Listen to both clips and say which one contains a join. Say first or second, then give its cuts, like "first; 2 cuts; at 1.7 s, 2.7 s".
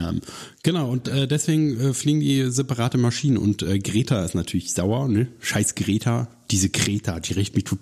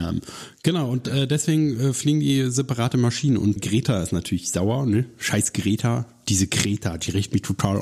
second; 1 cut; at 3.6 s